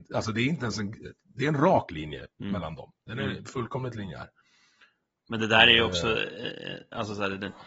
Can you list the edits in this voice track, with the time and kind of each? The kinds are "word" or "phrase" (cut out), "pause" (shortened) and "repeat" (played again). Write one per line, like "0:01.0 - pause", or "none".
none